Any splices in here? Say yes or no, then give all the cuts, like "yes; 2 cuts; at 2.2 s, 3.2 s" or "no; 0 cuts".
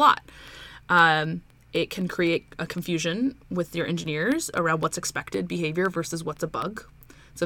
no; 0 cuts